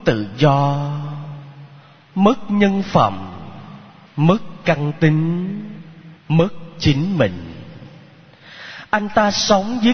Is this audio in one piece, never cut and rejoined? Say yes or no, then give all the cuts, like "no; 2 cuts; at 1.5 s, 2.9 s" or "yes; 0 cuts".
no; 2 cuts; at 4.1 s, 6.2 s